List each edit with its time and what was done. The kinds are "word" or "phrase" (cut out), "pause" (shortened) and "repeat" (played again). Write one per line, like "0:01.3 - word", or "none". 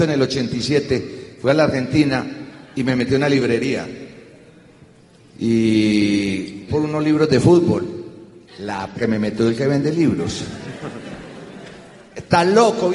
0:06.7 - word
0:08.9 - word

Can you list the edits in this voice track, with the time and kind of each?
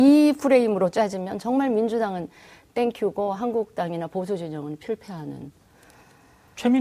none

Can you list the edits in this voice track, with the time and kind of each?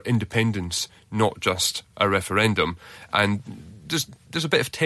none

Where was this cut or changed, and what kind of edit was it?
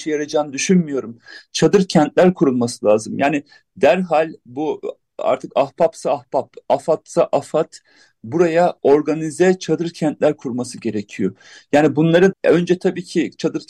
0:08.8 - pause
0:12.3 - word

